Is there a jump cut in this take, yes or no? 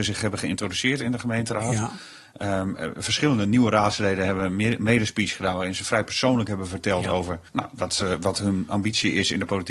yes